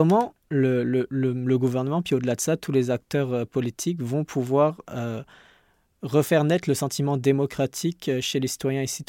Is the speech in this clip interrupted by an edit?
no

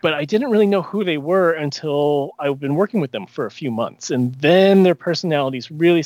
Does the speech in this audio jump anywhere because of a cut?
no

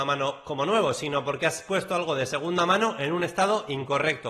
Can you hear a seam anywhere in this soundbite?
no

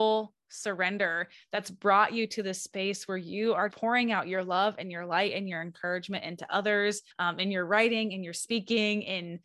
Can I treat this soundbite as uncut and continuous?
no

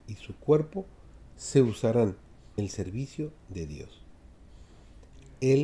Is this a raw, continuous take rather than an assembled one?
no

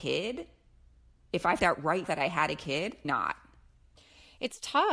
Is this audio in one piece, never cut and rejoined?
no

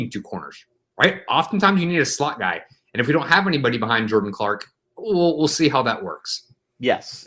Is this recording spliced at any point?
yes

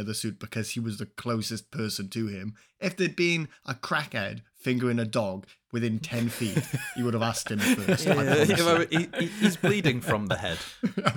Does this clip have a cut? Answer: no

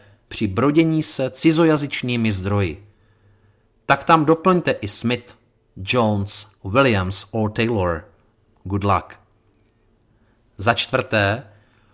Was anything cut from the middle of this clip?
no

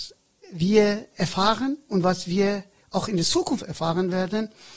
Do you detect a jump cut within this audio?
no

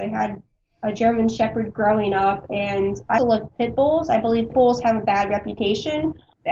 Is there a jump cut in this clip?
yes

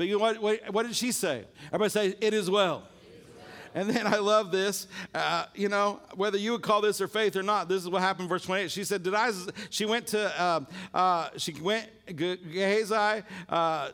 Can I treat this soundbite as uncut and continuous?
no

